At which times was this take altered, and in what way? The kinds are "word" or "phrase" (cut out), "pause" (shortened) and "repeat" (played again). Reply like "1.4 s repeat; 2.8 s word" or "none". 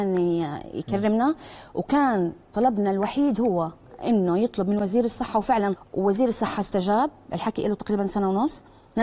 5.8 s word